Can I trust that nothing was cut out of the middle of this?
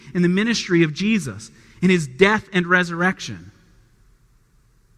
yes; 0 cuts

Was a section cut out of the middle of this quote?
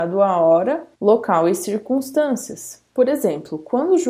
yes; 2 cuts; at 0.9 s, 2.9 s

